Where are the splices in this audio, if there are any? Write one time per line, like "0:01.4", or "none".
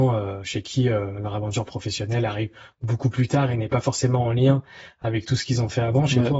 none